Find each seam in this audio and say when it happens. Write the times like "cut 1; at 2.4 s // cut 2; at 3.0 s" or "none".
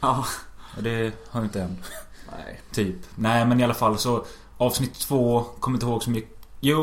cut 1; at 1.5 s